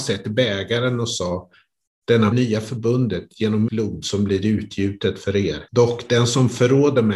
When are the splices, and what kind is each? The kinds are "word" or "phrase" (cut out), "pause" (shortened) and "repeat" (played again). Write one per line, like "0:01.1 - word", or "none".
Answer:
0:02.3 - phrase
0:03.7 - word
0:05.7 - pause

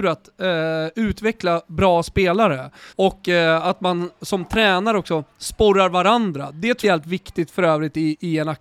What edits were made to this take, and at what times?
0:02.9 - pause
0:06.8 - word

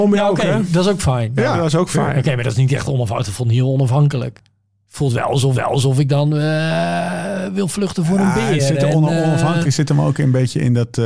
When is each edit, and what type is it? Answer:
0:05.5 - repeat

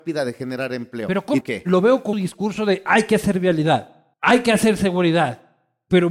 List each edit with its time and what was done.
0:01.4 - phrase
0:02.1 - word
0:04.1 - pause

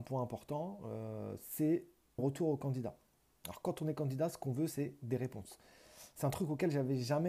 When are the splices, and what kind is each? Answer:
0:02.2 - word

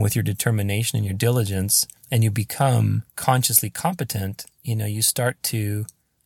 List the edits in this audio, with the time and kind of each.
0:02.0 - pause
0:03.1 - pause

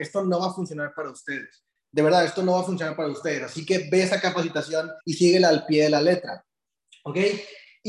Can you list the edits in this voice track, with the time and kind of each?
0:05.0 - pause

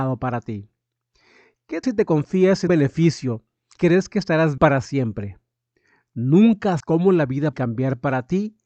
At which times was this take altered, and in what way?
0:01.8 - word
0:02.7 - word
0:03.8 - word
0:04.6 - word
0:06.8 - word
0:07.5 - word

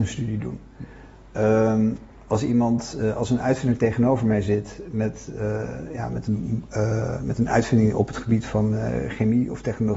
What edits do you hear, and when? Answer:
none

